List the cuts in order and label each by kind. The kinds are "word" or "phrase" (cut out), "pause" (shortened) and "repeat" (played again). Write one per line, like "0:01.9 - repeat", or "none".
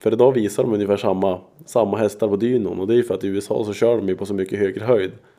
none